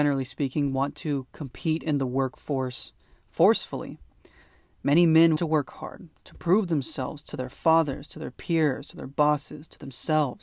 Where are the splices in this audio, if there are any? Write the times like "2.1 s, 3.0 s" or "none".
5.4 s